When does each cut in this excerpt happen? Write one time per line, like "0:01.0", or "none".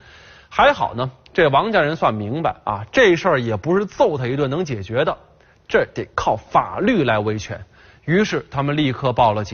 none